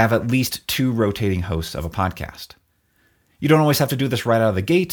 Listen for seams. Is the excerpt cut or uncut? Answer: uncut